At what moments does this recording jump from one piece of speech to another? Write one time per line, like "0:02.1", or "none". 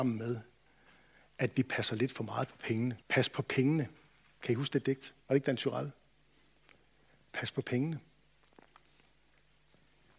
0:03.0
0:05.2